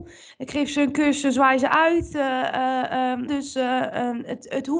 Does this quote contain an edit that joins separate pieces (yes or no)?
yes